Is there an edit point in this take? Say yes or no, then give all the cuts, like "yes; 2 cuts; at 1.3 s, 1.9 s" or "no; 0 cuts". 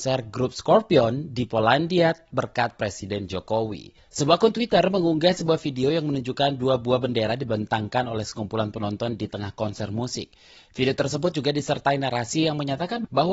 no; 0 cuts